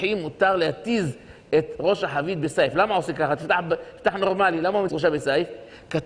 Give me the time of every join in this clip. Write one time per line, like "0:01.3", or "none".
0:04.9